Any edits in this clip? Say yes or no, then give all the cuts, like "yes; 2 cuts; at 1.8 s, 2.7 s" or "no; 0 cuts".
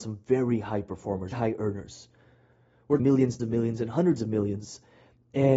yes; 3 cuts; at 1.3 s, 3.0 s, 3.4 s